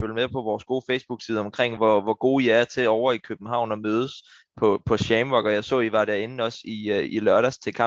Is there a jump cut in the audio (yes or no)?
no